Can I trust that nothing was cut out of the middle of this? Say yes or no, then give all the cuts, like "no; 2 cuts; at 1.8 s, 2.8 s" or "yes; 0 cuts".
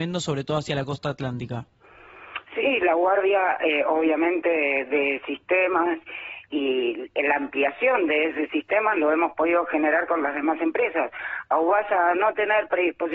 yes; 0 cuts